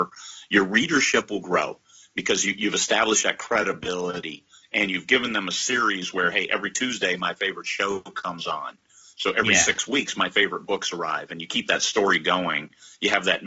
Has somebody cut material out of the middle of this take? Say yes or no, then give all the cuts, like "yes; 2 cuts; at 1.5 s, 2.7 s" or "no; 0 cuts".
no; 0 cuts